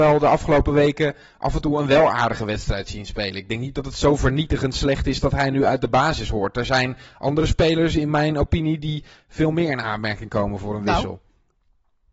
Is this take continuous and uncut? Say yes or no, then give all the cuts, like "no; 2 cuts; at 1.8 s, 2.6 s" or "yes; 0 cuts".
yes; 0 cuts